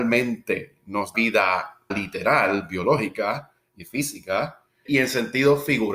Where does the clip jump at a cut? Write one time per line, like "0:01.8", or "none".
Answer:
0:01.1
0:01.9
0:04.9